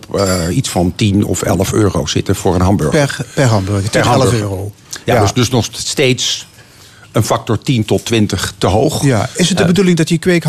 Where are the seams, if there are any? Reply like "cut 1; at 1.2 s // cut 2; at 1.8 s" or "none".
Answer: none